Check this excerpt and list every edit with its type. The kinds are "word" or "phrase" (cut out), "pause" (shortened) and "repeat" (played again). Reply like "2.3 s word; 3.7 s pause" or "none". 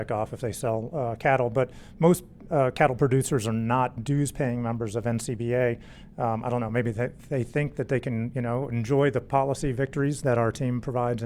none